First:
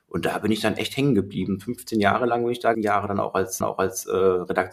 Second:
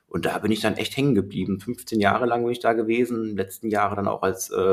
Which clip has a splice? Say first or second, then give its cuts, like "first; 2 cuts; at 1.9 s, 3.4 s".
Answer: first; 2 cuts; at 2.7 s, 3.6 s